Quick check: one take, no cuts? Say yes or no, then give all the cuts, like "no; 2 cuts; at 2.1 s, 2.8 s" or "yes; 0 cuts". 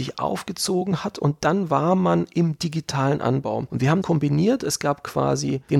no; 1 cut; at 4.0 s